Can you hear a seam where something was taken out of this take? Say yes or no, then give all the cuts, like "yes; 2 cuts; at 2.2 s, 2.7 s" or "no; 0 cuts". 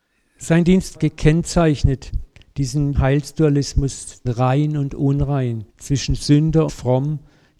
yes; 5 cuts; at 0.9 s, 2.9 s, 4.2 s, 5.7 s, 6.7 s